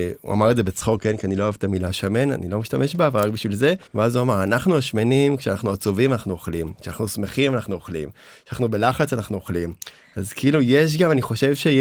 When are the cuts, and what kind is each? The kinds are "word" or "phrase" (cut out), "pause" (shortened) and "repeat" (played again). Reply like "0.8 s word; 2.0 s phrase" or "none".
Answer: 3.9 s pause